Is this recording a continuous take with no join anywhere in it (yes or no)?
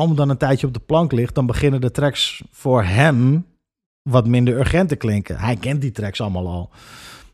yes